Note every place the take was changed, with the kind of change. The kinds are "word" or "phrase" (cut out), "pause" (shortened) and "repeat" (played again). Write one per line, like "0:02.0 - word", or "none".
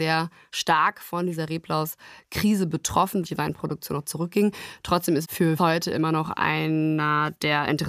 0:03.2 - word
0:04.0 - word
0:05.2 - word
0:05.6 - phrase